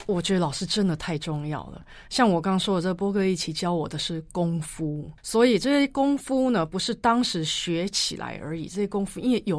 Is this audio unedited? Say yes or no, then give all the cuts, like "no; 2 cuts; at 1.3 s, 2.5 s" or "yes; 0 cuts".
no; 1 cut; at 5.2 s